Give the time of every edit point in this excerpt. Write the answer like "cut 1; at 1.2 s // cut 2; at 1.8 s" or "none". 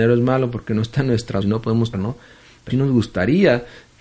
cut 1; at 1.4 s // cut 2; at 1.9 s // cut 3; at 2.7 s